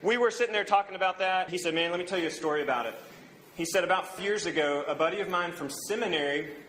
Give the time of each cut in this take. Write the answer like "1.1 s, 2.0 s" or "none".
1.5 s, 4.2 s

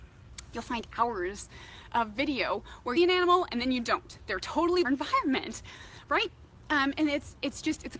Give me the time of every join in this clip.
3.0 s, 4.8 s

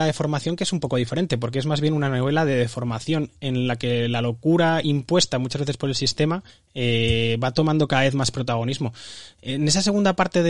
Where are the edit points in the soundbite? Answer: 6.5 s

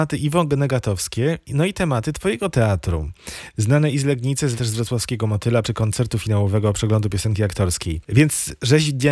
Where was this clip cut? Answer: 4.6 s, 5.6 s

